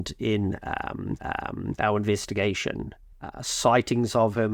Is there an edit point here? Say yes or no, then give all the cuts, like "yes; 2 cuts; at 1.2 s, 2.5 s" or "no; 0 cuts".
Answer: yes; 2 cuts; at 1.2 s, 3.1 s